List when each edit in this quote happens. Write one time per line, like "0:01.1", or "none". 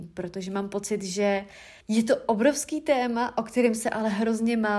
0:01.8